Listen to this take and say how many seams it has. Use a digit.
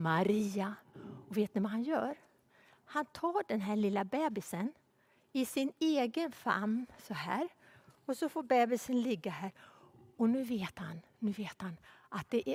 0